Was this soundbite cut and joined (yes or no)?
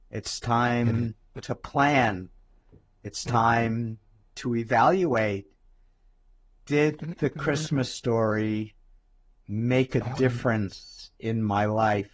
no